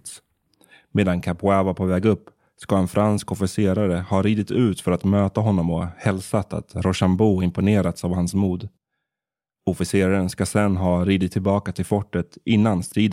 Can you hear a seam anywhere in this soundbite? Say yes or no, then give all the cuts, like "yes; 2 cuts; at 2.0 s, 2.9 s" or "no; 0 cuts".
no; 0 cuts